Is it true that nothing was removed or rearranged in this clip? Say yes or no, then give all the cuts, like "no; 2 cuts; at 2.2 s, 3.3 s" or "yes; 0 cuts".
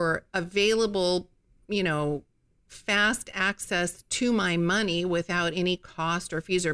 yes; 0 cuts